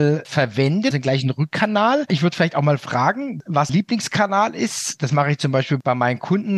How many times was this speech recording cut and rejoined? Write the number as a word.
two